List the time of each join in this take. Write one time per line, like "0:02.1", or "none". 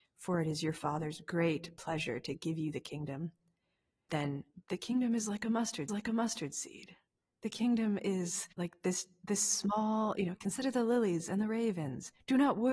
0:04.1
0:05.9
0:08.5